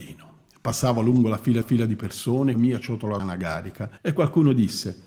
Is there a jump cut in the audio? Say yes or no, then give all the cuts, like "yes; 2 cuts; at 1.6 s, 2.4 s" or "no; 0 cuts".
yes; 4 cuts; at 1.6 s, 2.5 s, 3.2 s, 4.0 s